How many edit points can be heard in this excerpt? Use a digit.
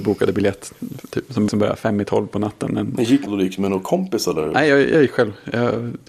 2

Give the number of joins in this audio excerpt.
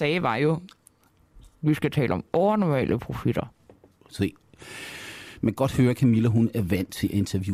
0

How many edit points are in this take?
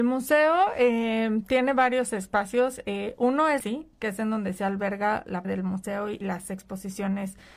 3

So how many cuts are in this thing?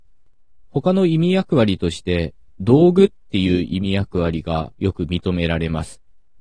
1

